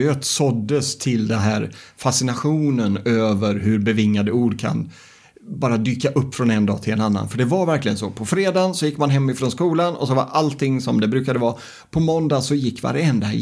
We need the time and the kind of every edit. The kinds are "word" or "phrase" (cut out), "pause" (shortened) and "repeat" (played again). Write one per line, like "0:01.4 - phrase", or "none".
none